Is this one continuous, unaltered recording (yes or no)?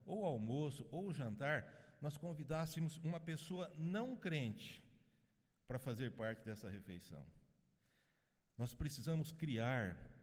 yes